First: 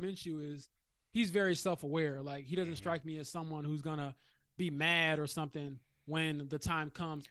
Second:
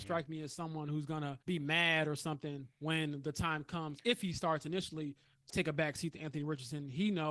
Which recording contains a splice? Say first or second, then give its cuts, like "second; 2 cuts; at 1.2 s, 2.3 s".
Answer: second; 3 cuts; at 1.4 s, 2.7 s, 5.5 s